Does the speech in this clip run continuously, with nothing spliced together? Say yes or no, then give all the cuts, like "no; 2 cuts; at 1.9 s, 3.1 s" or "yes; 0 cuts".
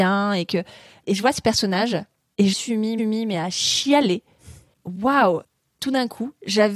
no; 2 cuts; at 2.5 s, 3.0 s